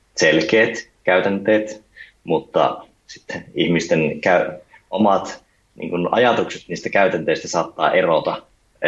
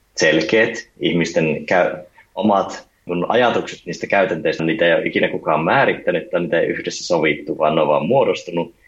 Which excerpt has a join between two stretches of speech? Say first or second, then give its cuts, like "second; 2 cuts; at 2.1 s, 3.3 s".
second; 3 cuts; at 1.0 s, 3.1 s, 4.6 s